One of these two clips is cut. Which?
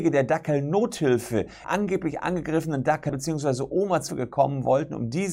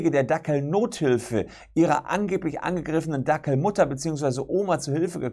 first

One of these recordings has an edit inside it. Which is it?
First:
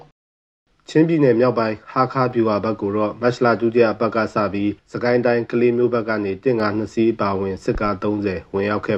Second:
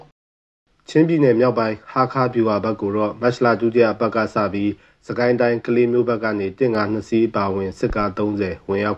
first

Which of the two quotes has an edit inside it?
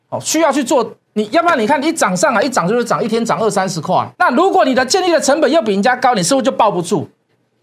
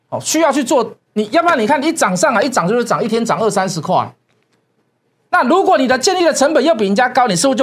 first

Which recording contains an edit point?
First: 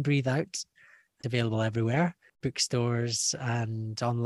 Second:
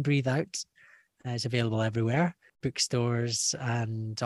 first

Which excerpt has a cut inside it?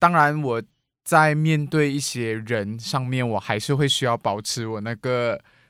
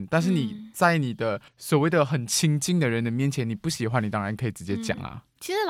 second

